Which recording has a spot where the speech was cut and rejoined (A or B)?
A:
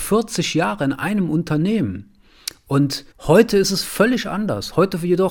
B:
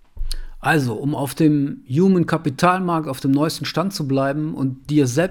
A